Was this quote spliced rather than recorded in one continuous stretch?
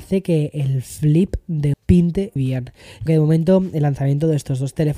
yes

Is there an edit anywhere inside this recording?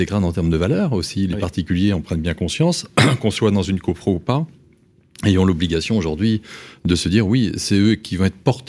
no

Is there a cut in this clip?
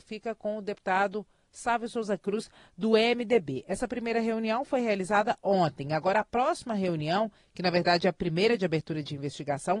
no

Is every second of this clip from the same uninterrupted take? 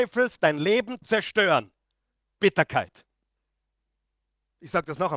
no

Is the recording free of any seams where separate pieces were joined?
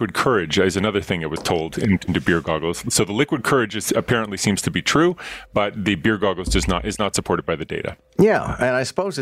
no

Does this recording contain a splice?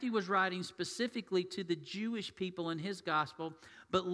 no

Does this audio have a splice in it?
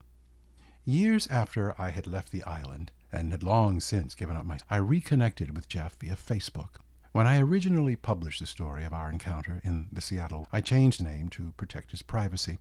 yes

